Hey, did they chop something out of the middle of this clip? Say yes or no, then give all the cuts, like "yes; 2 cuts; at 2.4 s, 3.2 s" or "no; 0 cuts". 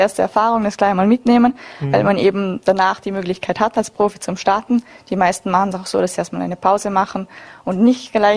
no; 0 cuts